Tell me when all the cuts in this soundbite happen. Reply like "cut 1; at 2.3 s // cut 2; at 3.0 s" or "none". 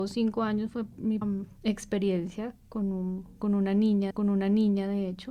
cut 1; at 1.2 s // cut 2; at 4.1 s